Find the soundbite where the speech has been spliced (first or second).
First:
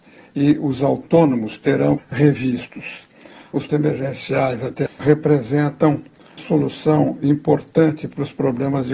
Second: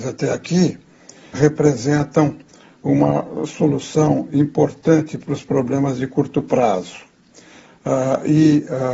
first